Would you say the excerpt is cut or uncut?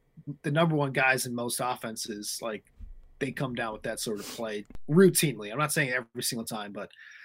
uncut